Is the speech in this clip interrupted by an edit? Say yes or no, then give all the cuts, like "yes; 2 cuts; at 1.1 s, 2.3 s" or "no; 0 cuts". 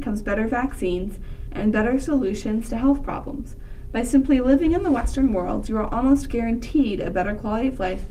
no; 0 cuts